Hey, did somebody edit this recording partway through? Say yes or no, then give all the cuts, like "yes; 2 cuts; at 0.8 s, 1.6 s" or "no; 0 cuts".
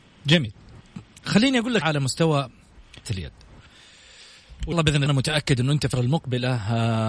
yes; 5 cuts; at 1.8 s, 3.0 s, 4.7 s, 5.1 s, 5.9 s